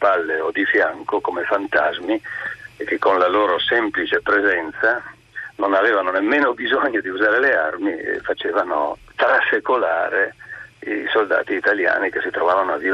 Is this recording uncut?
yes; 0 cuts

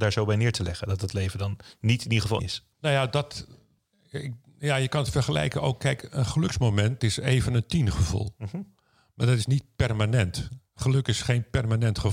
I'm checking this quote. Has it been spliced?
yes; 2 cuts; at 2.4 s, 7.0 s

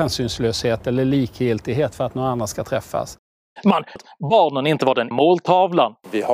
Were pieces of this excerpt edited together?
yes; 2 cuts; at 4.0 s, 5.1 s

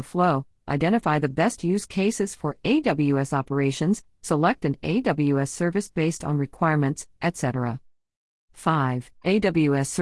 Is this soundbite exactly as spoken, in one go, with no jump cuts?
yes; 0 cuts

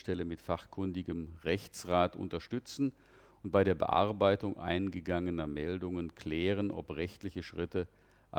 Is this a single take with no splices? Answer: yes; 0 cuts

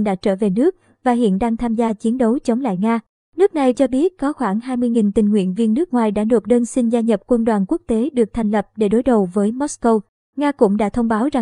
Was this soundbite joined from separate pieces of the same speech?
yes; 1 cut; at 3.7 s

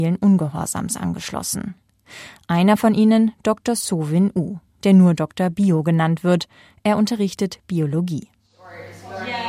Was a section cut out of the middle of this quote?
no; 0 cuts

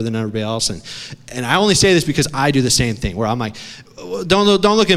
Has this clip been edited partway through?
no; 0 cuts

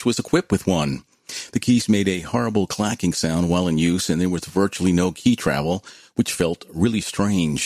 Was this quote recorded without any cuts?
yes; 0 cuts

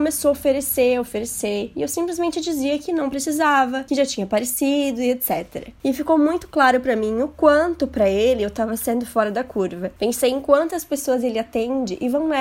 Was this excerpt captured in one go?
yes; 0 cuts

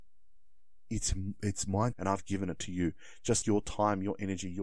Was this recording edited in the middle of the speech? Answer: yes; 2 cuts; at 1.9 s, 3.4 s

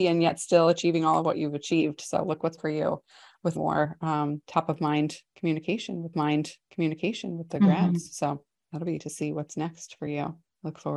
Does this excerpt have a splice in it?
yes; 4 cuts; at 2.6 s, 3.6 s, 6.1 s, 9.0 s

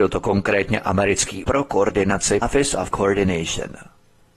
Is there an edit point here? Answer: yes; 3 cuts; at 1.4 s, 2.4 s, 2.9 s

